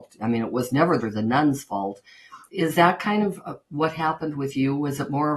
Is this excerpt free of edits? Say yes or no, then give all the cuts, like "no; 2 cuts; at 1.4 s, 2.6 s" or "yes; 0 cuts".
no; 2 cuts; at 1.0 s, 2.5 s